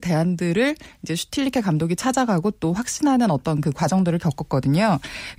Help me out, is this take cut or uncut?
uncut